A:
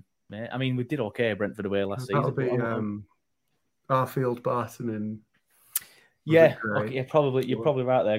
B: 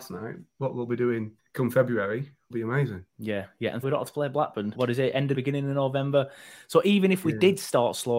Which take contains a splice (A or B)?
B